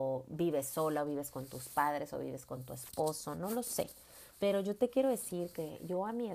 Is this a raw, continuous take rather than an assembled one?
no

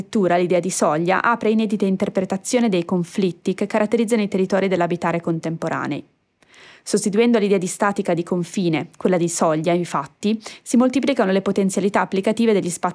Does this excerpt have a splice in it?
no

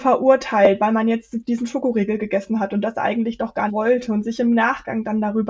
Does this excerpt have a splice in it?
yes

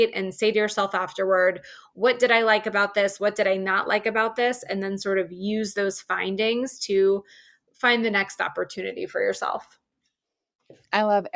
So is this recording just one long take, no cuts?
yes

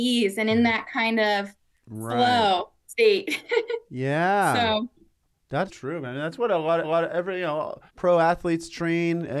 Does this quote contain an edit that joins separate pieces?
yes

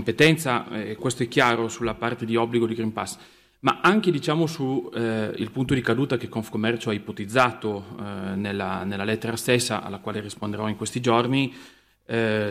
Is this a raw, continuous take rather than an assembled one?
no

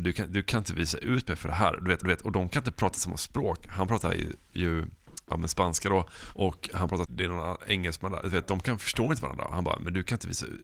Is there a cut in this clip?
yes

